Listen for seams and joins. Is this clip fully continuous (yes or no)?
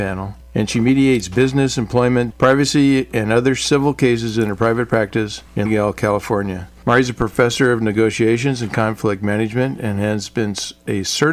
no